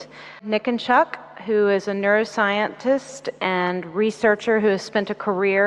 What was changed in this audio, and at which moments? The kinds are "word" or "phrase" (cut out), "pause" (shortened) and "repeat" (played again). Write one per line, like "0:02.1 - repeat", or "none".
none